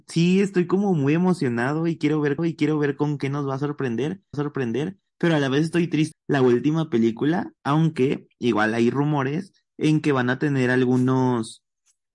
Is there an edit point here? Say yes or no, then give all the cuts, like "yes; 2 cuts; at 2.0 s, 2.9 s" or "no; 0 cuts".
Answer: yes; 5 cuts; at 2.4 s, 4.3 s, 6.1 s, 7.6 s, 9.7 s